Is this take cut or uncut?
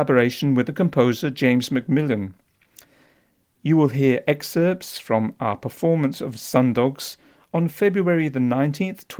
uncut